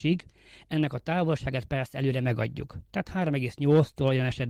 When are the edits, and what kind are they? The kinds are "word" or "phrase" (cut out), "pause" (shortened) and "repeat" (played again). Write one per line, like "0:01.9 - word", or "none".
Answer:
none